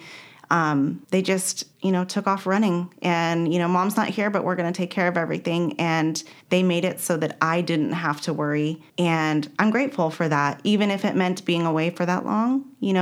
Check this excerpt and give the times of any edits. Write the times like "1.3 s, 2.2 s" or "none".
1.0 s, 1.7 s, 6.4 s, 8.9 s